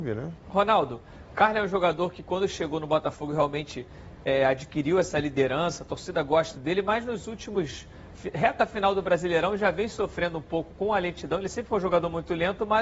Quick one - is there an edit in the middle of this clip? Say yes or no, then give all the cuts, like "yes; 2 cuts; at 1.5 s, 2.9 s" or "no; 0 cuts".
yes; 1 cut; at 6.5 s